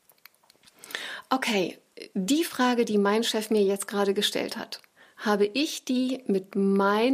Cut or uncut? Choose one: uncut